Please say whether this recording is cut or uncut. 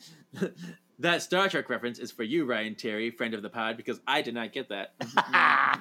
uncut